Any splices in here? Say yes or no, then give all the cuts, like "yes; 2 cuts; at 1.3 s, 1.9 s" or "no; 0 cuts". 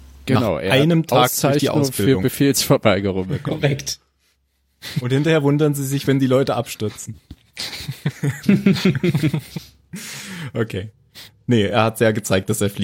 no; 0 cuts